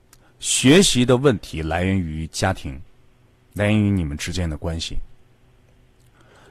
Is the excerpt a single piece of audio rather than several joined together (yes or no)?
yes